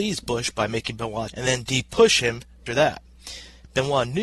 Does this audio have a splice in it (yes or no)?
yes